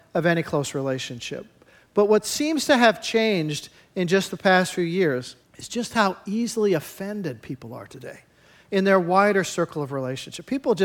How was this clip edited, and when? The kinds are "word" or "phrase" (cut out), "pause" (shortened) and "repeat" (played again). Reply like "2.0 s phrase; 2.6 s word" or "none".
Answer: 5.4 s pause